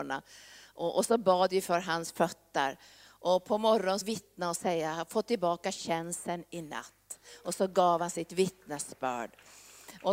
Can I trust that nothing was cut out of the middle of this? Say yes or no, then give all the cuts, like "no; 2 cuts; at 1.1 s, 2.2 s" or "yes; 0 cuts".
no; 1 cut; at 4.0 s